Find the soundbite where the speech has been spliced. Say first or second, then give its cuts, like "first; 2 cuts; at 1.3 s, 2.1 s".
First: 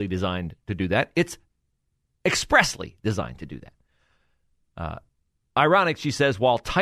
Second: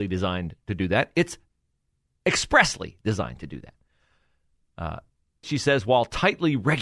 second; 1 cut; at 5.4 s